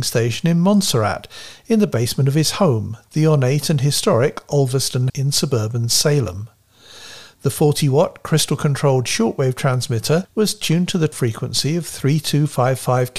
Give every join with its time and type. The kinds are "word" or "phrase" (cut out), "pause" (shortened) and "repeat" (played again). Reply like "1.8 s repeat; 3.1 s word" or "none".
5.1 s word